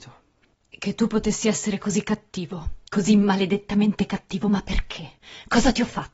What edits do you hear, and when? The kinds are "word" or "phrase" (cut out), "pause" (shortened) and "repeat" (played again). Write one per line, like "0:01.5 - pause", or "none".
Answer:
0:02.9 - pause

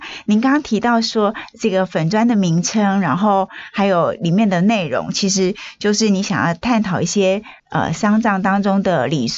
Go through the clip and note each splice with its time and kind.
0:07.6 - pause

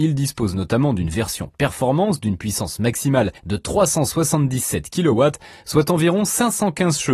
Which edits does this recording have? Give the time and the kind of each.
0:03.4 - pause

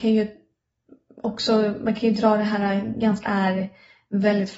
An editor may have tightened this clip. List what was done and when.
0:03.2 - phrase

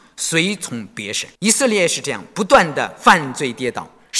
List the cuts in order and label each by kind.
0:01.4 - pause

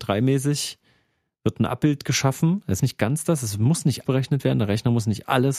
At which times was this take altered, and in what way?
0:02.8 - word
0:04.0 - word

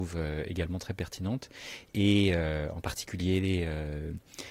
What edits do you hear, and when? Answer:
none

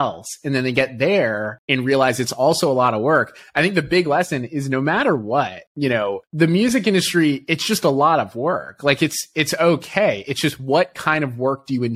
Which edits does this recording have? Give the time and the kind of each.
none

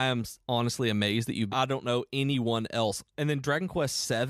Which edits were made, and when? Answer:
0:01.5 - phrase

